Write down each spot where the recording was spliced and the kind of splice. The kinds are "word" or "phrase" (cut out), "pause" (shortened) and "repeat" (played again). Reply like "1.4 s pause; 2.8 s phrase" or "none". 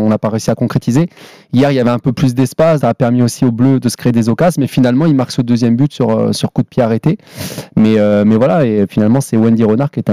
2.8 s word